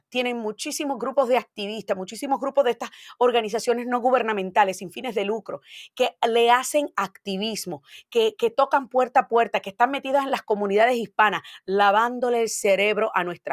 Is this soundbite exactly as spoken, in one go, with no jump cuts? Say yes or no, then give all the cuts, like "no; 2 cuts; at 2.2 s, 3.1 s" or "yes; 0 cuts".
yes; 0 cuts